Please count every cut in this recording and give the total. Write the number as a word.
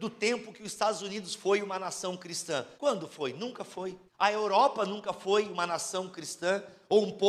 two